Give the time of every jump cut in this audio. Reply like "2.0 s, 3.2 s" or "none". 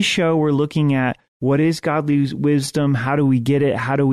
1.3 s